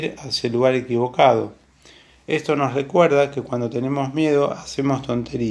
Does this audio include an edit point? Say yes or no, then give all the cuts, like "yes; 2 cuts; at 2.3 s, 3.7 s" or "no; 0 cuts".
no; 0 cuts